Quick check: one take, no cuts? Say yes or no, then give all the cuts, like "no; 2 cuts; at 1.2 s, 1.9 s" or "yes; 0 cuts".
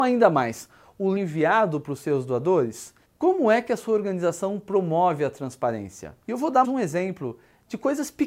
no; 4 cuts; at 1.2 s, 3.0 s, 6.2 s, 6.6 s